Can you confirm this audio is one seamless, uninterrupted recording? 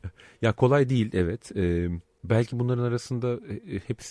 yes; 0 cuts

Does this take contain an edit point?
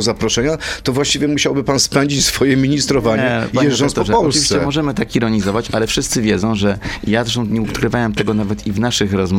no; 0 cuts

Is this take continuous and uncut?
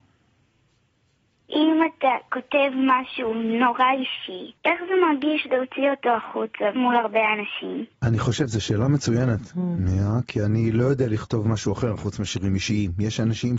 no; 3 cuts; at 4.6 s, 6.8 s, 7.9 s

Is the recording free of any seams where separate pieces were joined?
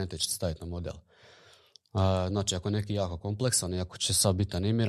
yes; 0 cuts

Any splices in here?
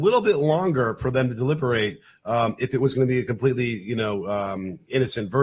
no; 0 cuts

